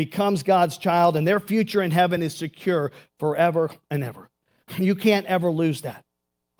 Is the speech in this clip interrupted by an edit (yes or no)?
no